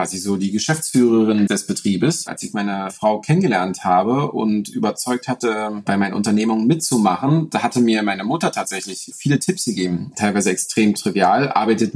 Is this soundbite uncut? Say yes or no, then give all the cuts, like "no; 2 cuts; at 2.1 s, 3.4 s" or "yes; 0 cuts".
no; 1 cut; at 1.5 s